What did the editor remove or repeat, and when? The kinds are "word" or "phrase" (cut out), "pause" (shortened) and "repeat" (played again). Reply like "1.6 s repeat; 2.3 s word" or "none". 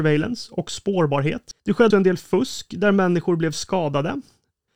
1.6 s pause; 1.9 s word